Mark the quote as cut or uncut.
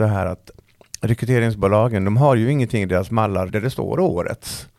cut